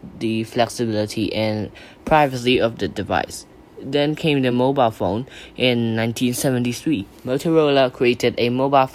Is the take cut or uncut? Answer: uncut